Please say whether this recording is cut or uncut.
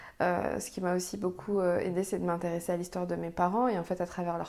uncut